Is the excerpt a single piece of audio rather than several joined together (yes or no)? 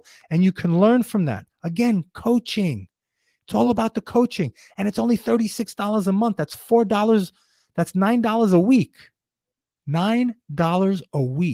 yes